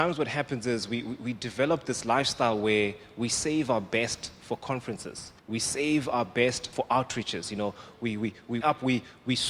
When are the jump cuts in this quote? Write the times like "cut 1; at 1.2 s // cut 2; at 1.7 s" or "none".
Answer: cut 1; at 5.4 s // cut 2; at 6.7 s // cut 3; at 8.6 s